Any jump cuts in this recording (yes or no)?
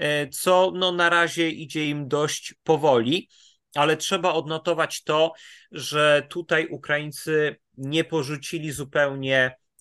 no